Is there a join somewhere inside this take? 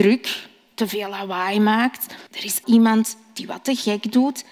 yes; 2 cuts; at 2.3 s, 2.6 s

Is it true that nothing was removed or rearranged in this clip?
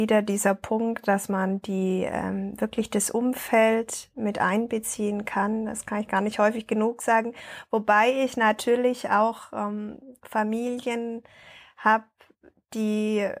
yes; 0 cuts

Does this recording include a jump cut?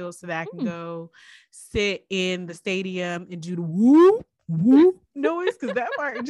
no; 0 cuts

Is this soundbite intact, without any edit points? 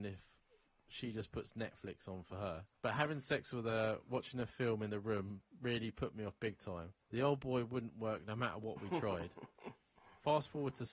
no; 2 cuts; at 2.7 s, 7.0 s

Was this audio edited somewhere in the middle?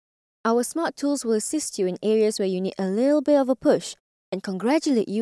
no; 0 cuts

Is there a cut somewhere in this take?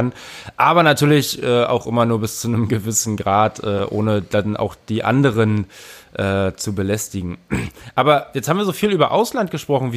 no; 0 cuts

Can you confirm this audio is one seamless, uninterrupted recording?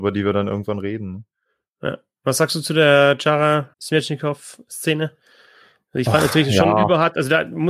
no; 1 cut; at 3.7 s

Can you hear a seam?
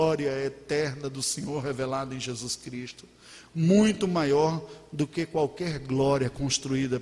no; 0 cuts

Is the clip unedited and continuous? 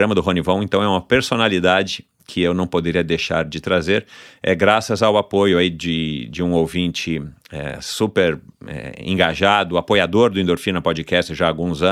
yes; 0 cuts

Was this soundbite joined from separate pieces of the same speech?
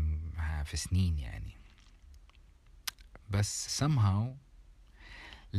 yes; 1 cut; at 3.7 s

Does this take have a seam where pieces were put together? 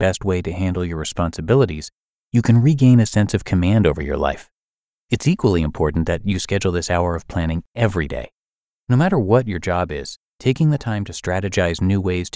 no; 0 cuts

